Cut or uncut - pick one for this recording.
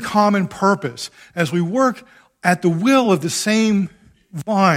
uncut